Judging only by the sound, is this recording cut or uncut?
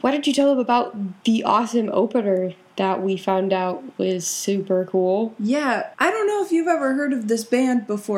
cut